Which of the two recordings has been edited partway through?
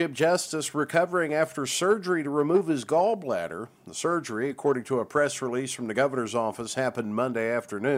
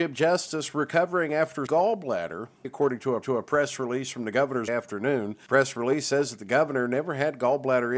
second; 4 cuts; at 1.7 s, 2.6 s, 3.2 s, 4.7 s

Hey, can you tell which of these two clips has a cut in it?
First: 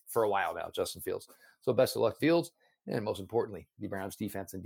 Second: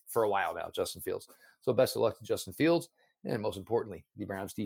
first; 1 cut; at 2.2 s

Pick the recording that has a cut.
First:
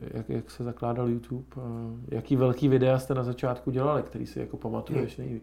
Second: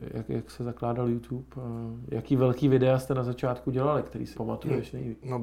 second; 1 cut; at 4.3 s

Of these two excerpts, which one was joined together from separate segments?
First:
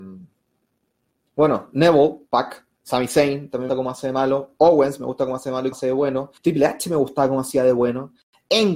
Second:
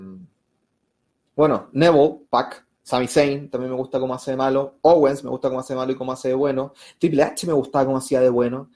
first; 3 cuts; at 3.7 s, 5.7 s, 6.4 s

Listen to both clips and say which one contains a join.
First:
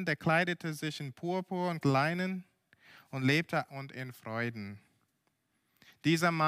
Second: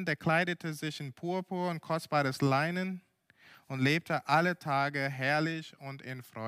first; 2 cuts; at 1.8 s, 3.7 s

